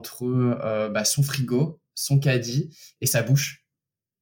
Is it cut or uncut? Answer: uncut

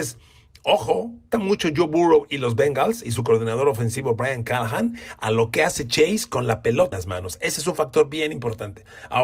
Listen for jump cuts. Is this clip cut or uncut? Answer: cut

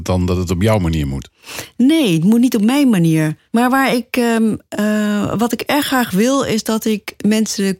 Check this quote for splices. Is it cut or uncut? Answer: cut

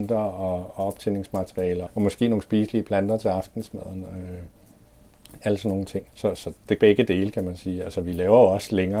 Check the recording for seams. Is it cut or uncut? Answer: cut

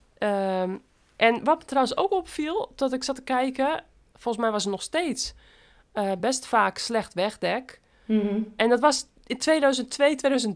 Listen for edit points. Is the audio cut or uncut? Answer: uncut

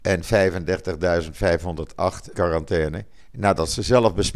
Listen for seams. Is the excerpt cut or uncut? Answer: cut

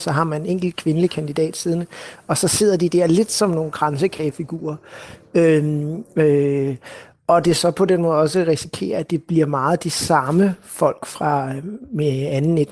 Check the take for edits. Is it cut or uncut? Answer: uncut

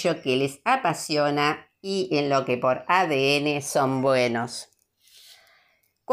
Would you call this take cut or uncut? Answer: uncut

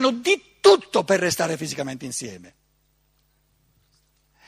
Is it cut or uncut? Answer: uncut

